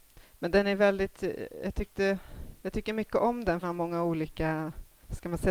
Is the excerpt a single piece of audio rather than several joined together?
no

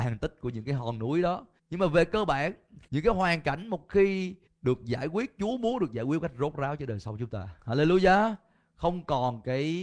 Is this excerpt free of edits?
no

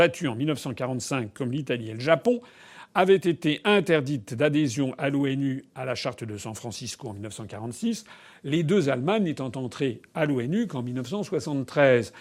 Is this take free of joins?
yes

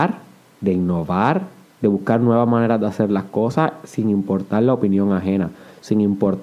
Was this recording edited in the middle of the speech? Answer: yes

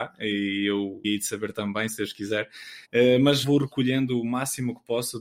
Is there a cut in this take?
yes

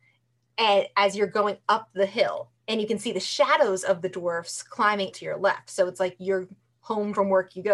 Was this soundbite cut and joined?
yes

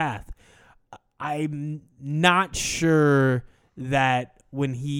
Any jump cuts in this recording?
no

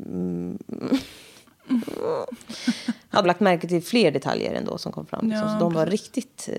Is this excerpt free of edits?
no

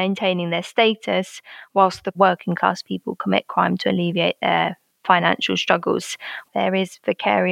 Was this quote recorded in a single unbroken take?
yes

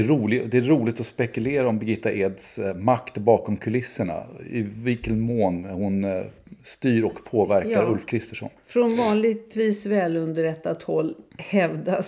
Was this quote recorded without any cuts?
yes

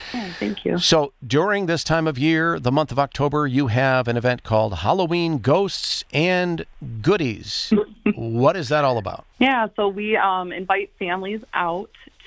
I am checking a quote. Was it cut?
yes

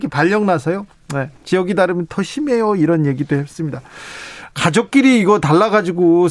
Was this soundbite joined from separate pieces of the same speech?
yes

